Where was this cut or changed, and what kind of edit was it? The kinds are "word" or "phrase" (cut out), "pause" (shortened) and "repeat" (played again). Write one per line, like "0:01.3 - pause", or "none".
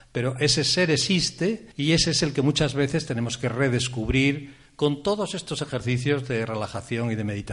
0:01.7 - pause